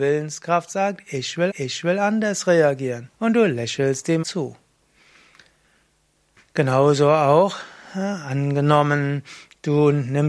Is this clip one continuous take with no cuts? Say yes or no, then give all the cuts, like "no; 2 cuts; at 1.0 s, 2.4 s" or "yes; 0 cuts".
no; 3 cuts; at 1.5 s, 3.1 s, 4.2 s